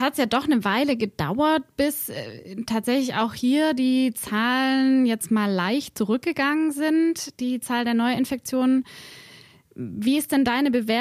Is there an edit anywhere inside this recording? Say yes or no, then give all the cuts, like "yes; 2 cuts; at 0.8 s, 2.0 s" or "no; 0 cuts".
no; 0 cuts